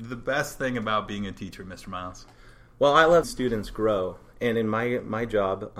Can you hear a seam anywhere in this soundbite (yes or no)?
yes